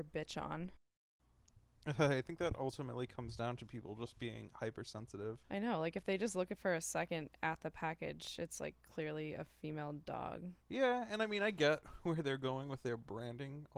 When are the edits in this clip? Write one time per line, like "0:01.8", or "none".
0:05.4
0:10.6